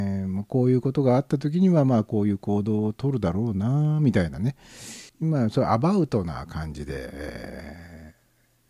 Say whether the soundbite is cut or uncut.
cut